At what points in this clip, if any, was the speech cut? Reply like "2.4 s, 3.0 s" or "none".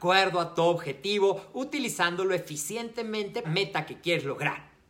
3.4 s